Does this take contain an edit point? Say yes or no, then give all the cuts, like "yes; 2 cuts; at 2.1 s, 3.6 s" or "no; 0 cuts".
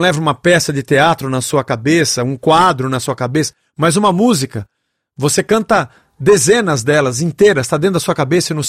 no; 0 cuts